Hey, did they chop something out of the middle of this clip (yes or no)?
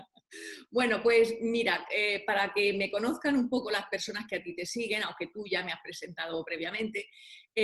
no